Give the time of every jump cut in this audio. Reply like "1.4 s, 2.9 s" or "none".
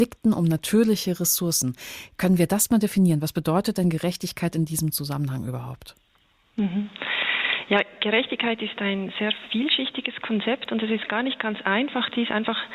none